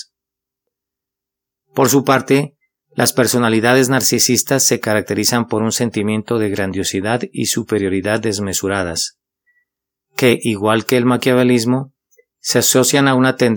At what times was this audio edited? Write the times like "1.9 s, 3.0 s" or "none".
none